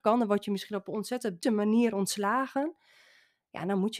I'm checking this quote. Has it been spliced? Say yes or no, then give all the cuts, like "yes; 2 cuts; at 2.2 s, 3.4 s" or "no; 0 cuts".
yes; 1 cut; at 1.4 s